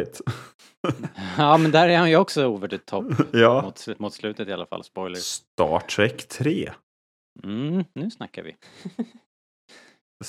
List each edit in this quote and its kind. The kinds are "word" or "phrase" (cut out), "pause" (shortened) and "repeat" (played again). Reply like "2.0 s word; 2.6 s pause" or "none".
none